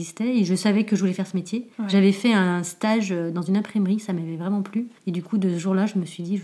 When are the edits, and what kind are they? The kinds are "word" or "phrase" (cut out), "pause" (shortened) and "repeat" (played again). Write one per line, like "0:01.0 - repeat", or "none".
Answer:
0:01.7 - pause
0:05.0 - pause